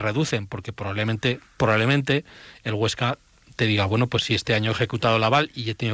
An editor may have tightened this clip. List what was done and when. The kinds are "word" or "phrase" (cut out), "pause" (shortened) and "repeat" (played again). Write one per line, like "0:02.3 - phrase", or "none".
none